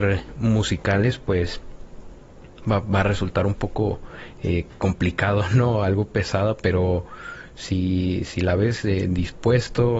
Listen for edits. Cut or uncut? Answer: uncut